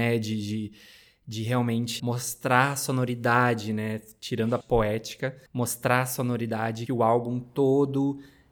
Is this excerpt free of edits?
no; 4 cuts; at 2.0 s, 4.6 s, 5.5 s, 6.9 s

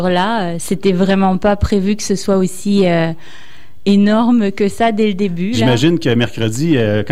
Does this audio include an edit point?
no; 0 cuts

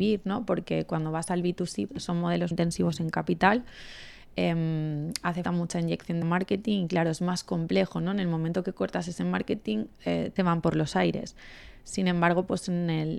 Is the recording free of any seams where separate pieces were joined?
no; 5 cuts; at 1.9 s, 2.5 s, 5.4 s, 6.2 s, 10.4 s

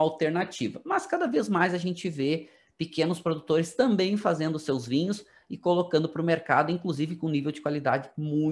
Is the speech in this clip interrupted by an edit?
no; 0 cuts

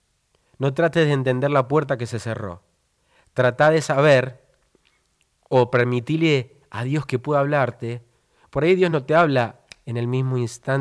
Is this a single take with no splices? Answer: yes; 0 cuts

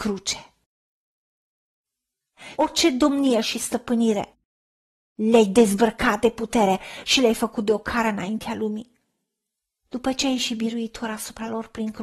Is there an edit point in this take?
no; 0 cuts

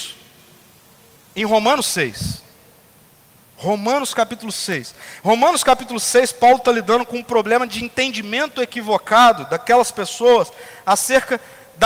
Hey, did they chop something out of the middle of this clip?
no; 0 cuts

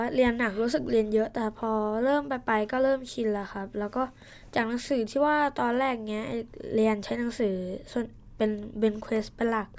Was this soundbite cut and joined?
no; 0 cuts

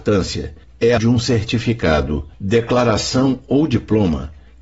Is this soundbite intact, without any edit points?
no; 2 cuts; at 1.0 s, 2.3 s

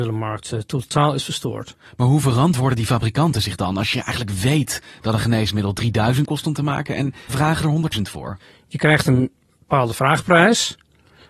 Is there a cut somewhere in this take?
yes; 3 cuts; at 6.2 s, 7.3 s, 7.9 s

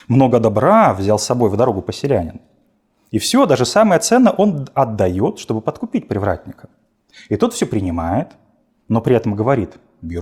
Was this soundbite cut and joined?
no; 0 cuts

